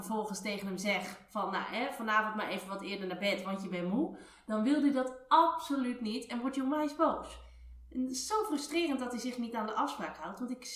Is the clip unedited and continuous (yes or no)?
yes